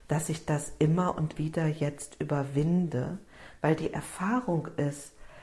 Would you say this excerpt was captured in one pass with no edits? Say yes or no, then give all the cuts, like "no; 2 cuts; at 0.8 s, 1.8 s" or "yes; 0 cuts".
no; 1 cut; at 1.4 s